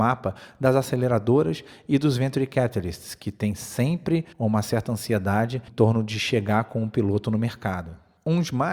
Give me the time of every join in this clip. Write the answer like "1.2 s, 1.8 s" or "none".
4.3 s, 5.7 s